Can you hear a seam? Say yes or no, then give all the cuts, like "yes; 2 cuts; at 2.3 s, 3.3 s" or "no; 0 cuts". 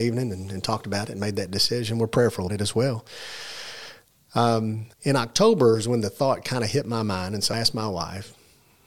yes; 3 cuts; at 2.5 s, 4.9 s, 7.5 s